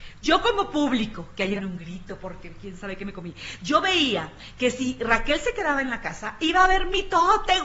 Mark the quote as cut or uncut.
cut